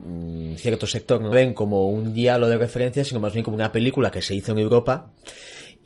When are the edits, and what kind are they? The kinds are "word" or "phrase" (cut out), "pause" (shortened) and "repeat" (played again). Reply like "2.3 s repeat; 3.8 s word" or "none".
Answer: 1.3 s word

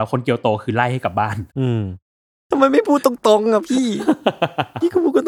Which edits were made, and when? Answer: 1.5 s pause; 2.1 s pause

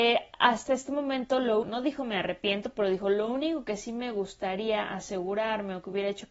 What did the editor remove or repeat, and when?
1.6 s word

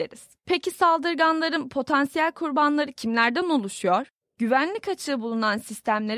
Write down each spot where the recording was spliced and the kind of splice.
none

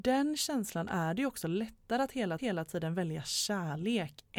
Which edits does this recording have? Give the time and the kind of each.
2.4 s repeat

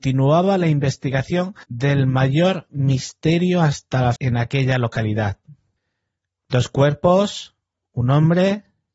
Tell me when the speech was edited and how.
1.6 s pause; 4.2 s word; 5.8 s pause

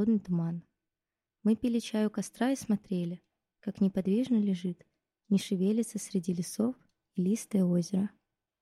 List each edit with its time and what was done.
none

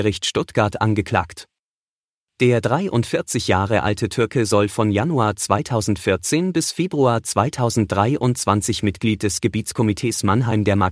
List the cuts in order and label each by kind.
none

